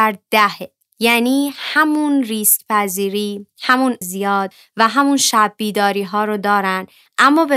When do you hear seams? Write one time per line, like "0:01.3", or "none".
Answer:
0:04.0